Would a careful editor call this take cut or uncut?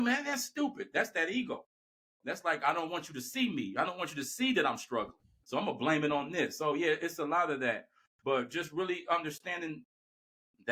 uncut